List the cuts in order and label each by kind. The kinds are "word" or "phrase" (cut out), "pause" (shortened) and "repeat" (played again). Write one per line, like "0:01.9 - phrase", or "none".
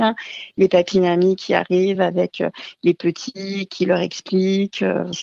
none